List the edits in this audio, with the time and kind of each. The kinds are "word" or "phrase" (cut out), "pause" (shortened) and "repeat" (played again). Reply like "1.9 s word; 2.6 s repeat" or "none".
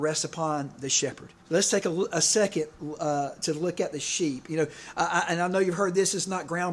1.4 s pause